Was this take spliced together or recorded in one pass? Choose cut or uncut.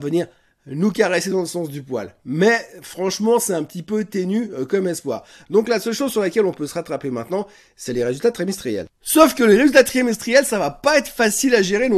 uncut